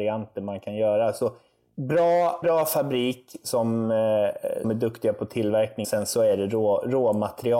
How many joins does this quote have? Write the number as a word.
three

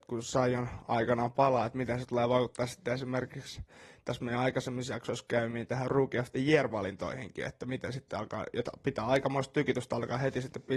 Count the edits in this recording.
zero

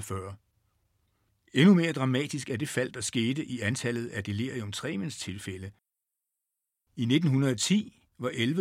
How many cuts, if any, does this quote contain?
zero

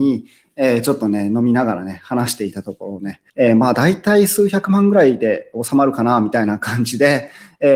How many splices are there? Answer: one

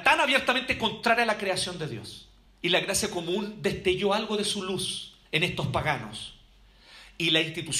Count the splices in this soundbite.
one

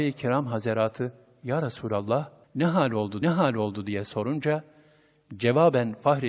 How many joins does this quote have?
two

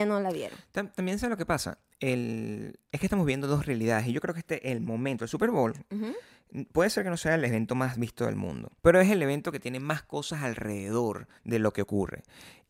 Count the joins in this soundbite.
two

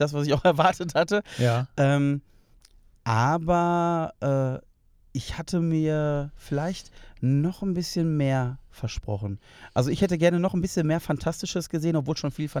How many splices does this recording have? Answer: zero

